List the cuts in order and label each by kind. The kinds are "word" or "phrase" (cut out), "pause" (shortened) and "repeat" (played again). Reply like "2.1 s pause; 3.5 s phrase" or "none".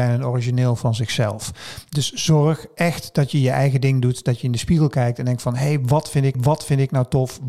6.3 s repeat

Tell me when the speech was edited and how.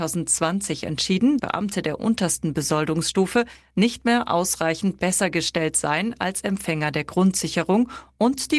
1.4 s word

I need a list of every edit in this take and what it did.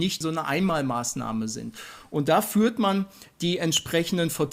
none

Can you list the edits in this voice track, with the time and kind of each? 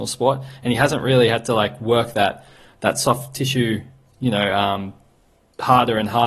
none

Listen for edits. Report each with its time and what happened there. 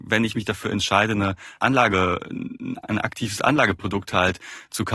1.6 s word

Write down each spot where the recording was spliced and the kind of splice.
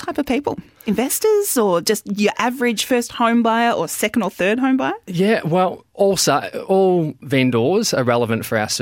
5.9 s pause

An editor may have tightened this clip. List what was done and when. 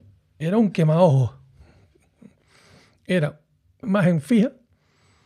3.8 s word

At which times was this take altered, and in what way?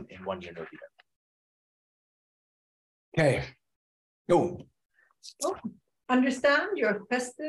none

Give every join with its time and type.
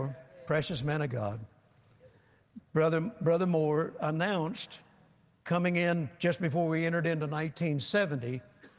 6.2 s pause

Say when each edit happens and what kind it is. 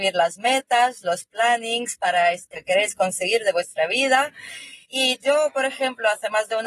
2.5 s phrase; 4.8 s pause

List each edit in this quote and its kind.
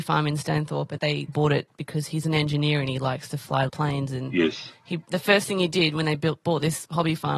1.0 s word; 1.3 s word; 3.7 s word

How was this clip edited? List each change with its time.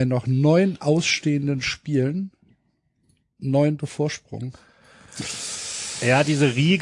3.8 s word

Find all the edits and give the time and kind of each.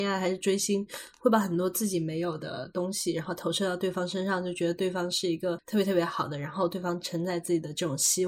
none

